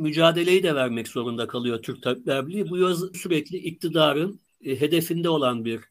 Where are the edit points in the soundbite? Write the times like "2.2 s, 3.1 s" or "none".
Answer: 3.1 s, 4.5 s

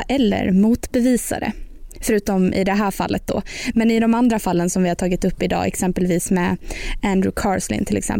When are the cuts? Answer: none

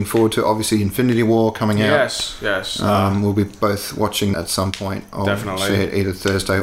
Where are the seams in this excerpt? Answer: 4.3 s

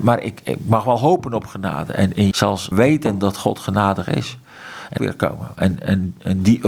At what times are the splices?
2.3 s, 2.7 s, 5.0 s

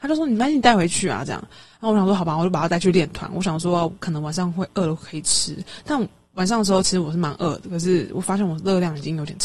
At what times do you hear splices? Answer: none

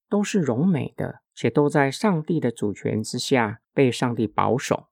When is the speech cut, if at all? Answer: 1.3 s, 3.6 s

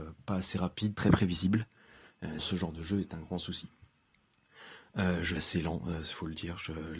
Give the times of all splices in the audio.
0.9 s, 2.4 s, 5.4 s

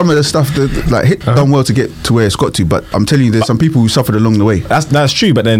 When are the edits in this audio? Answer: 1.2 s, 2.9 s

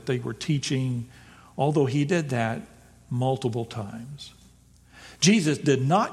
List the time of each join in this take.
none

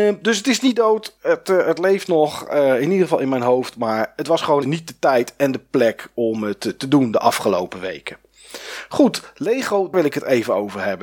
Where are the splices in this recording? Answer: 4.6 s, 9.9 s

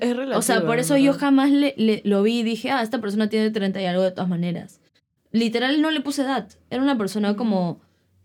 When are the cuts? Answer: none

